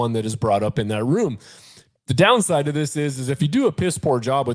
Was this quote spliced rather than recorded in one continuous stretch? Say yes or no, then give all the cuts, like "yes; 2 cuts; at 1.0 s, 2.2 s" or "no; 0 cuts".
no; 0 cuts